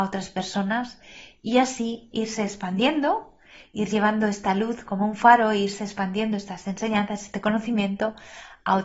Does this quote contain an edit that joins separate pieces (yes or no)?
no